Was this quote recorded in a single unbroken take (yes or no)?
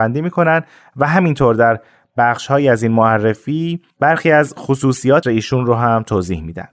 no